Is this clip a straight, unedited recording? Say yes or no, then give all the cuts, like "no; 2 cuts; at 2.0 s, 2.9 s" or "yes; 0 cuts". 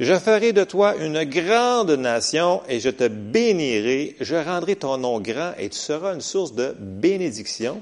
yes; 0 cuts